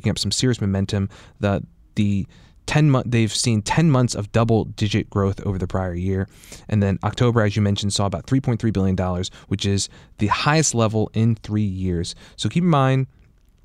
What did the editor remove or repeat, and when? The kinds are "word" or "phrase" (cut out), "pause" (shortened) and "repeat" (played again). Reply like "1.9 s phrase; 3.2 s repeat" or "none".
none